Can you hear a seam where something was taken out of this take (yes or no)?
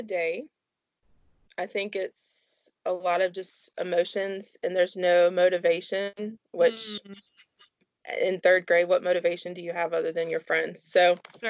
no